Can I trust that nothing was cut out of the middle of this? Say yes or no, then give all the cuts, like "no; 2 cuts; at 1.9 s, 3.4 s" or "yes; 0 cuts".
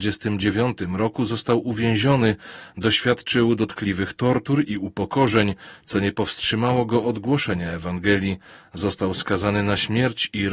yes; 0 cuts